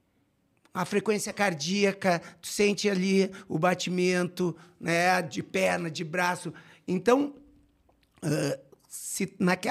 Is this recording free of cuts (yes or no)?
yes